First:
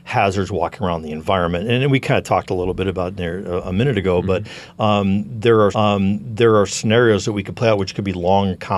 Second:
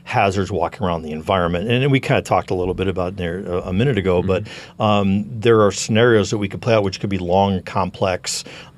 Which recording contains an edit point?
first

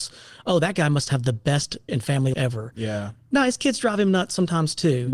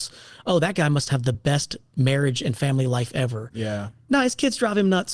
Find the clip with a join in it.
first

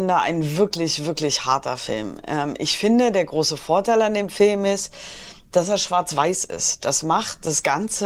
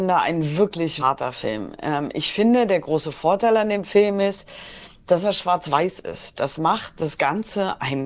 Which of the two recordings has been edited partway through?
second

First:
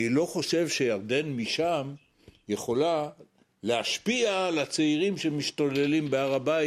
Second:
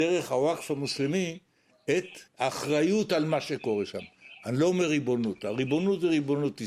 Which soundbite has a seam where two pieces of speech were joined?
second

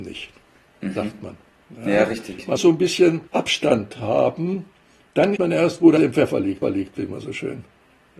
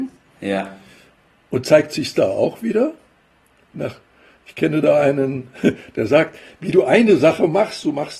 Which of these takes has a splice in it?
first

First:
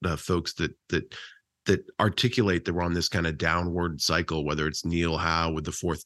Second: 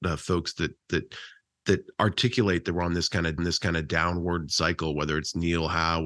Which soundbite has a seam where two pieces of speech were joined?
second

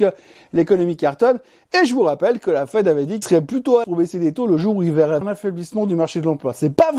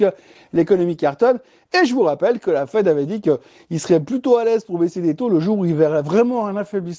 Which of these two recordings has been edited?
first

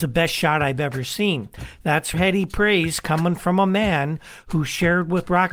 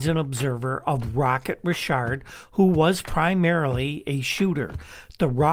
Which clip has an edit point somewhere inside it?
first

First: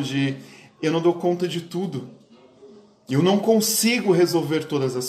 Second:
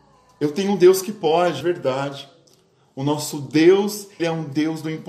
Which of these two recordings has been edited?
second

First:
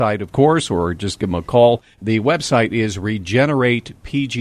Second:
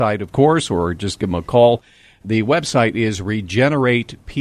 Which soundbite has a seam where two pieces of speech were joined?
first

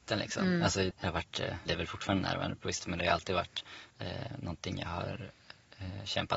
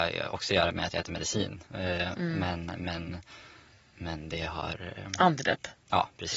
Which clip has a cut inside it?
first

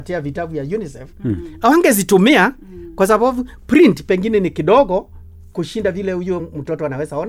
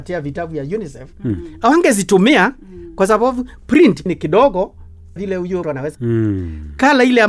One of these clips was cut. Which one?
second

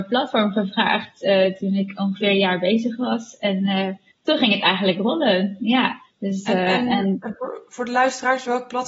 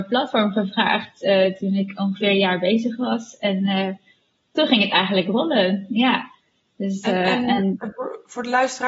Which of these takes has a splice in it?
first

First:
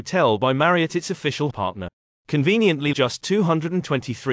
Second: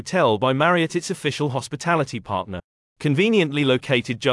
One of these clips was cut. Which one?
first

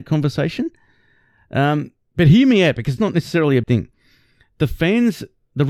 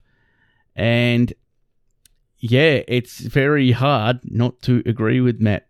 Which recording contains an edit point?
first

